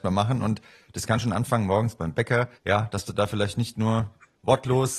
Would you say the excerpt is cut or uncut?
cut